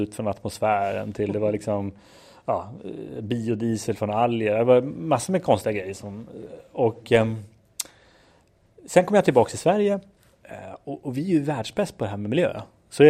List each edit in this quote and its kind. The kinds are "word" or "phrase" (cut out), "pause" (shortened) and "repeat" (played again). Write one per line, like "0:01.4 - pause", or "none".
none